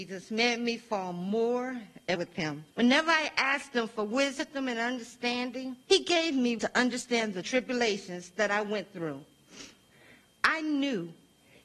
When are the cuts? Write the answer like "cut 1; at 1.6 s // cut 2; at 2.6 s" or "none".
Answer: cut 1; at 2.2 s // cut 2; at 2.7 s // cut 3; at 5.8 s // cut 4; at 6.6 s // cut 5; at 7.4 s